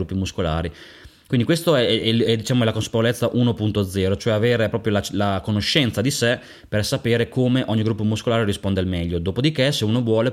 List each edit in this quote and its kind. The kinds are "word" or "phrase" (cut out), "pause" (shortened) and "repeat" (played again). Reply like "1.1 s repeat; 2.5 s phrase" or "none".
none